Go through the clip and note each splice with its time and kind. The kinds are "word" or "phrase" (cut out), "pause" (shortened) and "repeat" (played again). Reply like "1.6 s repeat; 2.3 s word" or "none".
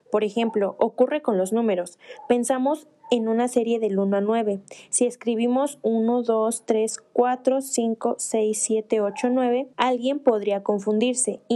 9.7 s pause